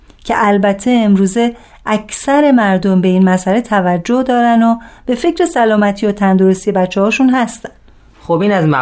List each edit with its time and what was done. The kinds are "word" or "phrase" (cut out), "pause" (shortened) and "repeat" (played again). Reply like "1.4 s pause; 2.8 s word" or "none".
none